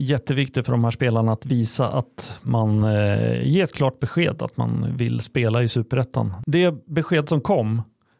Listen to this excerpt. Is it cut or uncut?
uncut